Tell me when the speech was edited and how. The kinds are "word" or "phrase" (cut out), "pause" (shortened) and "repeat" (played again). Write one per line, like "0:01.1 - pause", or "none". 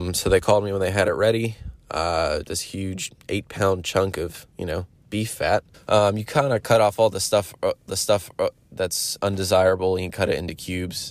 0:02.4 - word
0:04.5 - pause
0:05.7 - pause
0:07.9 - repeat